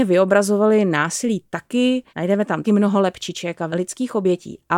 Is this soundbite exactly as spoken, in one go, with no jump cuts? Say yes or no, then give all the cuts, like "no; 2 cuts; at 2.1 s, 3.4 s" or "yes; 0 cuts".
no; 3 cuts; at 2.1 s, 2.6 s, 3.7 s